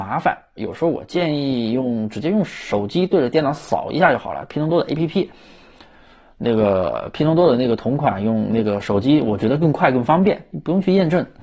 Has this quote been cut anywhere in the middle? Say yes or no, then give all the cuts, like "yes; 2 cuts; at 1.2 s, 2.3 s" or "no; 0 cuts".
no; 0 cuts